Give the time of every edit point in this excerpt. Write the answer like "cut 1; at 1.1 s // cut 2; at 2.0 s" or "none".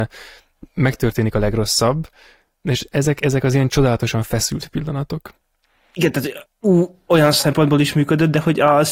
none